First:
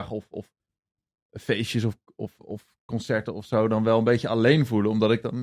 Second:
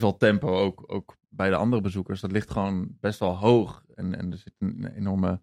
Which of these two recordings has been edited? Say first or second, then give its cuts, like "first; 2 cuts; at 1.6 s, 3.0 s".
second; 1 cut; at 1.2 s